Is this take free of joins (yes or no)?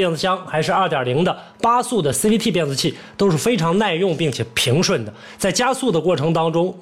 yes